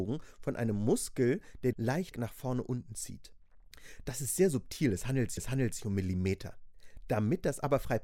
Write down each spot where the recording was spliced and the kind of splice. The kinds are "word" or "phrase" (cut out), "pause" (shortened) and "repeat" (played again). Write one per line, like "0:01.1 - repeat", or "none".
0:01.7 - phrase
0:02.1 - word
0:05.4 - repeat